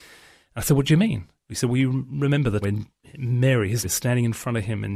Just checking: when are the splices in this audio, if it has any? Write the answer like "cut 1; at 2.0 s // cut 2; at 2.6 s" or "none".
cut 1; at 2.6 s // cut 2; at 3.8 s